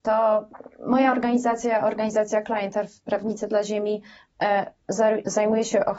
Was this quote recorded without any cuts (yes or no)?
yes